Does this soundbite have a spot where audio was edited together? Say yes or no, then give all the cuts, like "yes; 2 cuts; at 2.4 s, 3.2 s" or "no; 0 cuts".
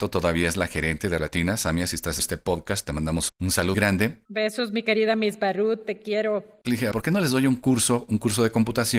yes; 5 cuts; at 1.2 s, 2.2 s, 3.3 s, 3.7 s, 6.9 s